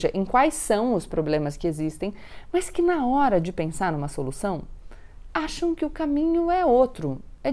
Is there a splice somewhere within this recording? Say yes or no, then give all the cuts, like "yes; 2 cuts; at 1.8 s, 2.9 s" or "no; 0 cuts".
no; 0 cuts